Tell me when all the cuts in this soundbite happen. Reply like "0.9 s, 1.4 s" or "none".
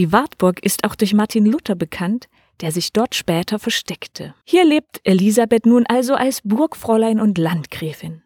4.4 s